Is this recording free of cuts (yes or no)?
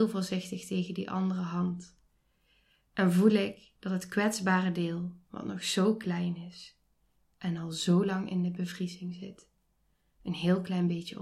yes